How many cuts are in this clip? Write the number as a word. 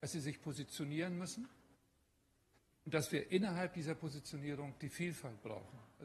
zero